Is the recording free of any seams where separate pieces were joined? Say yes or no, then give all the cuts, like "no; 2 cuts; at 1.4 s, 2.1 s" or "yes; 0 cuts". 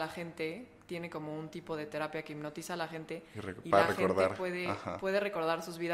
yes; 0 cuts